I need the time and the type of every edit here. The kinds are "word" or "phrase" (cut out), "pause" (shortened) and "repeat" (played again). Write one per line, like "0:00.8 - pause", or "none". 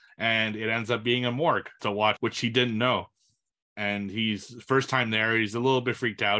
0:01.8 - phrase
0:02.2 - word